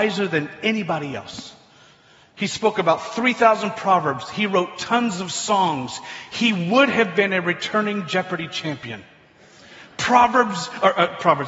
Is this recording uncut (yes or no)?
yes